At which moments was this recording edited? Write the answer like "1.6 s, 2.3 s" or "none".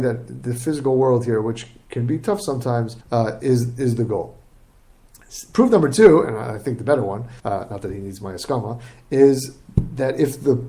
3.0 s, 7.4 s